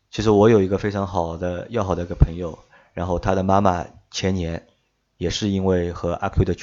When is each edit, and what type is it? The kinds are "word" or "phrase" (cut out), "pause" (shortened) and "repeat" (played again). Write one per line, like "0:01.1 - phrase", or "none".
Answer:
none